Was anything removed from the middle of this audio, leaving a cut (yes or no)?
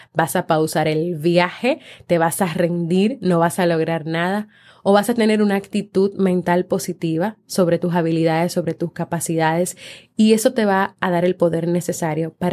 no